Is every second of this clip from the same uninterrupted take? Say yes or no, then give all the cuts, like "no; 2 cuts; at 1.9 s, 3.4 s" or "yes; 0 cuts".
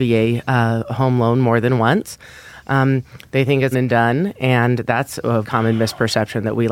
no; 2 cuts; at 3.7 s, 5.4 s